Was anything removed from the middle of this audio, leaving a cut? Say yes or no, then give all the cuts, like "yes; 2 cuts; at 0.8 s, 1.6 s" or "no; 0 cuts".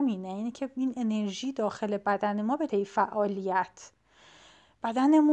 yes; 1 cut; at 2.7 s